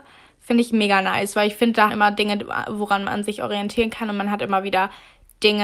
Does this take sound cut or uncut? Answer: cut